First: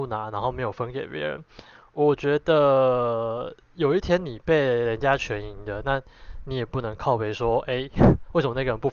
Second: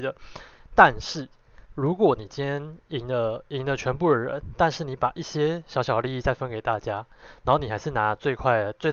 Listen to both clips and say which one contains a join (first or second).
second